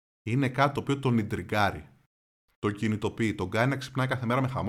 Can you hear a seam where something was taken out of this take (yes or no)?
no